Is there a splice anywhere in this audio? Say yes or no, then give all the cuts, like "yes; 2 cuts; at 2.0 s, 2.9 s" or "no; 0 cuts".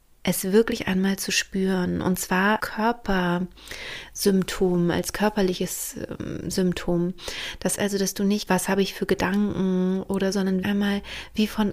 yes; 5 cuts; at 2.6 s, 7.8 s, 8.5 s, 10.3 s, 10.6 s